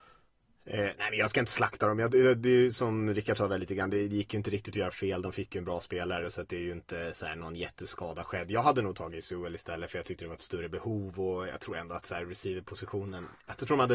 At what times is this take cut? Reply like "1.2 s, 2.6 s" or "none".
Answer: none

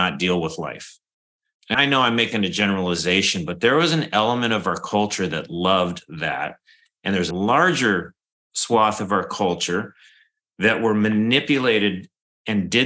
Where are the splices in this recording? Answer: 1.7 s, 7.3 s

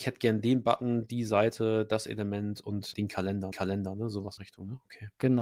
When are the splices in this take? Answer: 2.9 s, 3.5 s, 4.4 s

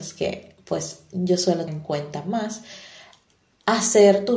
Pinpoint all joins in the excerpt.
1.7 s

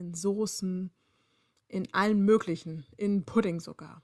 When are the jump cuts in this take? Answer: none

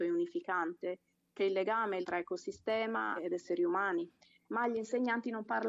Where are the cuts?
1.4 s, 2.0 s, 3.2 s

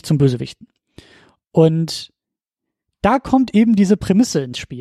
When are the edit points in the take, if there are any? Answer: none

